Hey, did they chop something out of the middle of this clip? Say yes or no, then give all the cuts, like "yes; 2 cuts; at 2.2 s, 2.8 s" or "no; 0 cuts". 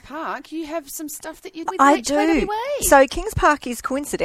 yes; 1 cut; at 1.7 s